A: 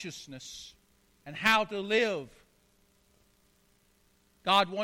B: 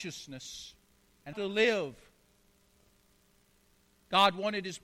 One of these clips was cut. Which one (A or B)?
B